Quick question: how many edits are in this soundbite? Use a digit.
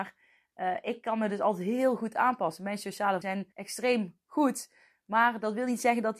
2